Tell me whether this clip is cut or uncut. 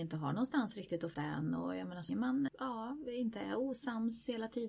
cut